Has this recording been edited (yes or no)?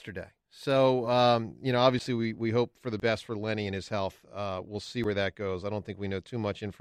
no